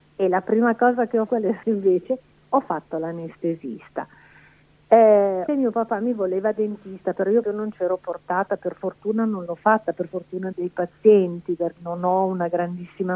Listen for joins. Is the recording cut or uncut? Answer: cut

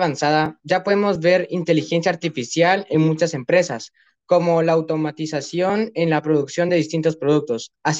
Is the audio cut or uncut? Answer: uncut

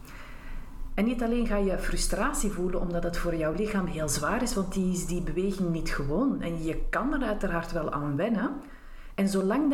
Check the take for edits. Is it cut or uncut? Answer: uncut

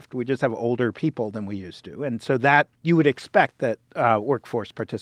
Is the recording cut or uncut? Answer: cut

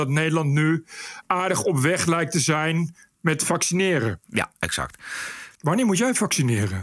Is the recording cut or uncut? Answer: uncut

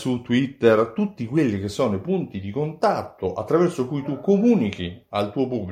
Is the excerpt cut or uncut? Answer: uncut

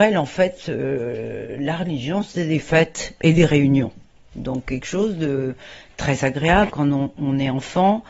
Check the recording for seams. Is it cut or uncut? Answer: cut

